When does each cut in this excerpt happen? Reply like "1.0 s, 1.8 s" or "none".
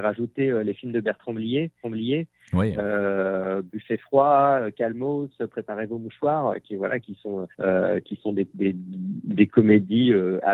1.8 s, 7.5 s

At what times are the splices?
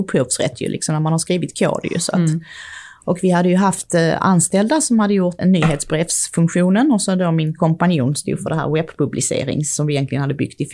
5.4 s

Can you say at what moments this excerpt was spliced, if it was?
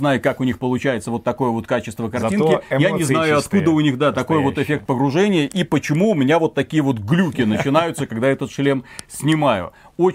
none

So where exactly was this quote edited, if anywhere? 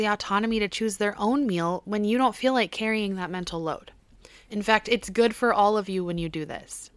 none

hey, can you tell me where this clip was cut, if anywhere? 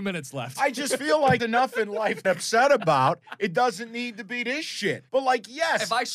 1.4 s, 2.2 s, 5.1 s

